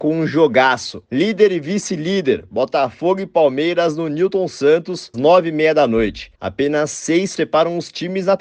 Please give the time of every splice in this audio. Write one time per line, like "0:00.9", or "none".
0:05.1
0:06.3
0:07.4